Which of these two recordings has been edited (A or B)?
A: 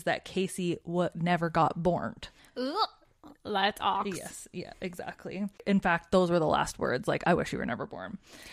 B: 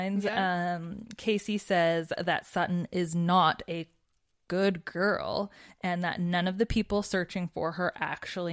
A